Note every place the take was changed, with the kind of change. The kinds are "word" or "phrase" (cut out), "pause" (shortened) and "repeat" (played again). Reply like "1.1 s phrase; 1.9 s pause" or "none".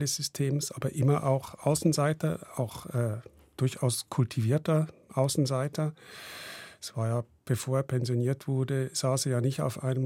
none